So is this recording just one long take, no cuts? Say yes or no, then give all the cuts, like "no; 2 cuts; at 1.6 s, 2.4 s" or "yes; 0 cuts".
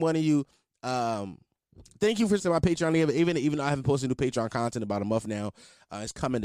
no; 1 cut; at 2.4 s